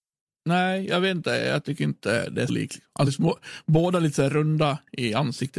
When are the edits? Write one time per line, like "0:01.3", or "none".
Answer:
0:02.5
0:03.1